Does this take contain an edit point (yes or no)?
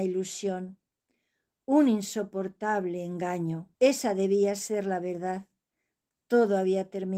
yes